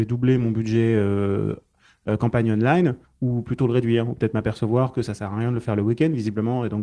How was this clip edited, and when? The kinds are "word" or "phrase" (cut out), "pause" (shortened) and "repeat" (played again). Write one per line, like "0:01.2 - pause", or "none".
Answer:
none